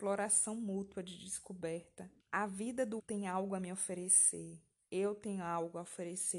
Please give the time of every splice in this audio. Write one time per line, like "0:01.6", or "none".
0:02.2
0:03.0